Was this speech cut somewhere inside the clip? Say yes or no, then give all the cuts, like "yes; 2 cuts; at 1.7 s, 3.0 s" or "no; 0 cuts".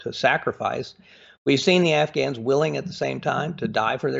no; 0 cuts